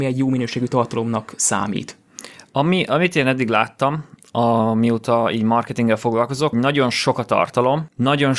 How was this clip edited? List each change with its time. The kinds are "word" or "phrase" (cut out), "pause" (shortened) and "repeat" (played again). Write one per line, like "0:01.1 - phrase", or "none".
0:06.5 - word

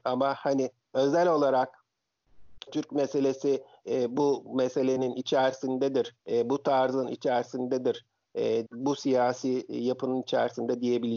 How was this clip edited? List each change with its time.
0:02.7 - word
0:06.2 - pause
0:08.7 - word

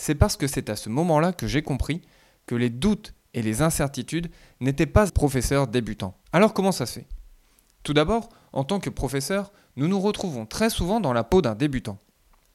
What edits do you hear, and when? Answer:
0:05.1 - phrase
0:06.2 - pause

